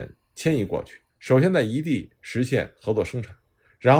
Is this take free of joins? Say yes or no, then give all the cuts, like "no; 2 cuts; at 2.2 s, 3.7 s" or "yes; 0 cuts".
no; 1 cut; at 1.1 s